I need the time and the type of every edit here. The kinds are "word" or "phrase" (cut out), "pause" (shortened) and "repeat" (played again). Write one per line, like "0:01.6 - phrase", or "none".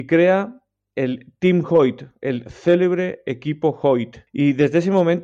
0:04.3 - pause